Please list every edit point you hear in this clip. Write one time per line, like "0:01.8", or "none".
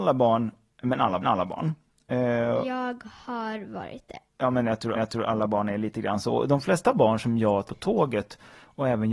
0:01.2
0:04.3
0:04.9
0:07.6